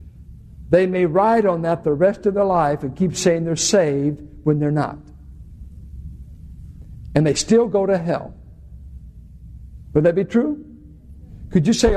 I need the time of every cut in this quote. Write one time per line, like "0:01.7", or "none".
none